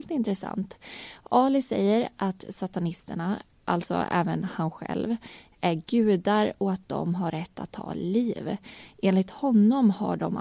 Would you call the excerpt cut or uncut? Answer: uncut